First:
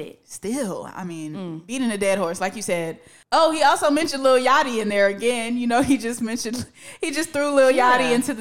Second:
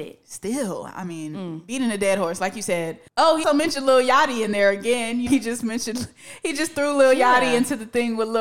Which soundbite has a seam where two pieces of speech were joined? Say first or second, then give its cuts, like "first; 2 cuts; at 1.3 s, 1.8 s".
second; 3 cuts; at 3.1 s, 3.4 s, 5.3 s